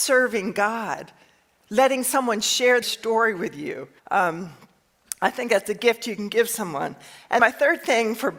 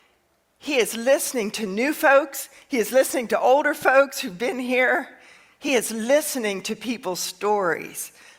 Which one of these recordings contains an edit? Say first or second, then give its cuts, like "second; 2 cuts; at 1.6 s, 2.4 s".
first; 3 cuts; at 2.8 s, 4.0 s, 7.4 s